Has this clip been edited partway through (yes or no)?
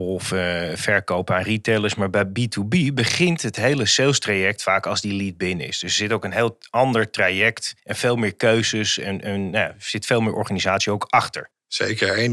yes